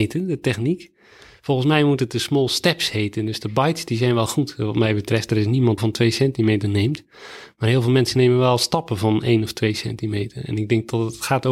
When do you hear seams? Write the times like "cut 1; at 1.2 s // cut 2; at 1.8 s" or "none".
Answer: cut 1; at 5.8 s